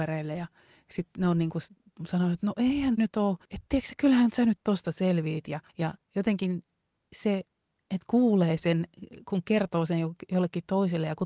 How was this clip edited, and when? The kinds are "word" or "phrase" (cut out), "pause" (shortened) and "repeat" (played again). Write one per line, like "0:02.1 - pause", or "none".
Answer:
0:03.0 - word
0:03.4 - pause
0:05.7 - pause
0:07.8 - phrase